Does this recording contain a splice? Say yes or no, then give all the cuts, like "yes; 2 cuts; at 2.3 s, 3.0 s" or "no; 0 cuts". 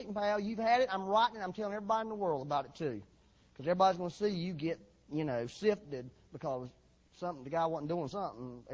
no; 0 cuts